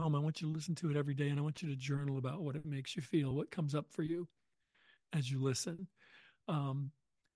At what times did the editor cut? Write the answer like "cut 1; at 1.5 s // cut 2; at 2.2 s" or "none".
none